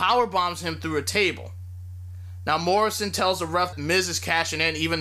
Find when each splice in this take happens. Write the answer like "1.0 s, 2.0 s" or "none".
3.7 s